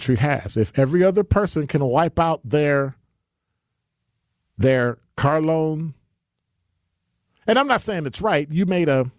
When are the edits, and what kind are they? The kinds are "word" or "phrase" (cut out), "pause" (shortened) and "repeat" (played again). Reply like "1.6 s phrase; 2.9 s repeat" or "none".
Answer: none